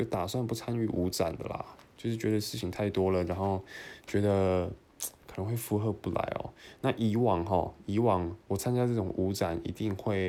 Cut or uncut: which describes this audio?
cut